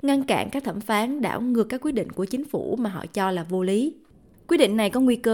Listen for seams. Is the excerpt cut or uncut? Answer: uncut